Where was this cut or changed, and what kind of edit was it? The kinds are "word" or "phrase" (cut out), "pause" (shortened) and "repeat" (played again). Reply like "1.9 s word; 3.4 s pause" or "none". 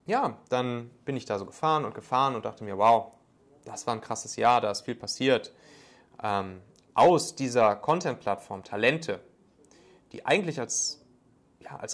none

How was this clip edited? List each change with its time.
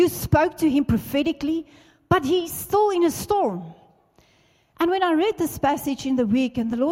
none

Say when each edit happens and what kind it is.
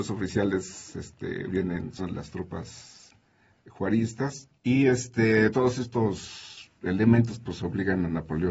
1.5 s word; 2.0 s word; 4.6 s pause; 5.5 s word

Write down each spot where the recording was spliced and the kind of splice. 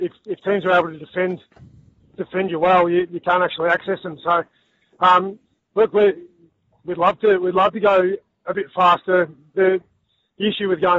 none

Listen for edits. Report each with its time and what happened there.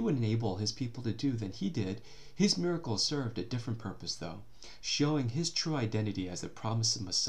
none

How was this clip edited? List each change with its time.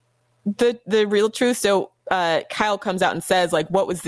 none

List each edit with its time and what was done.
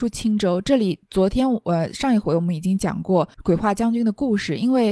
1.0 s pause; 3.3 s pause

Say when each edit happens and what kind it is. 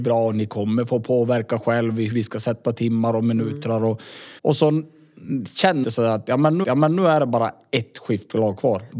2.1 s word; 4.4 s pause; 5.8 s phrase; 6.6 s repeat

